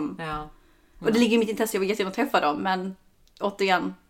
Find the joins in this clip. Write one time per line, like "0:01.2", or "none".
none